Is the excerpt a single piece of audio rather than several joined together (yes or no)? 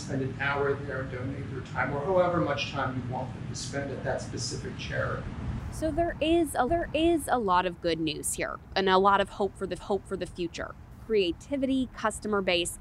no